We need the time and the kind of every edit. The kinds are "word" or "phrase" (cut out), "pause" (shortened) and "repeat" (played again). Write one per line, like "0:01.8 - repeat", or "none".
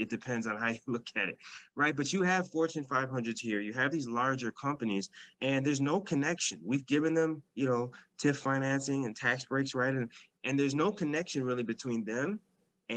0:05.3 - pause
0:07.5 - pause